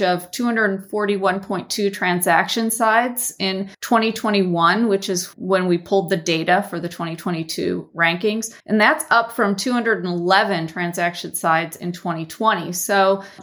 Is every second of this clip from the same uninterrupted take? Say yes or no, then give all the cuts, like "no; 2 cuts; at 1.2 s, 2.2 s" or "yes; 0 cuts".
no; 2 cuts; at 3.7 s, 8.6 s